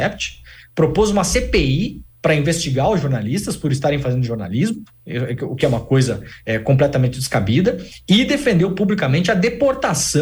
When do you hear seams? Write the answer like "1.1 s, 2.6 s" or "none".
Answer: none